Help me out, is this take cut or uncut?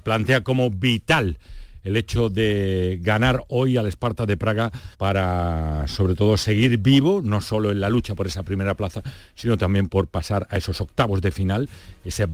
cut